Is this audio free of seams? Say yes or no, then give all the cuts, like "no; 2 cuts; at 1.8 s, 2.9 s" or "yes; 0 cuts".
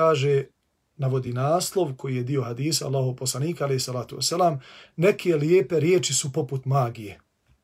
yes; 0 cuts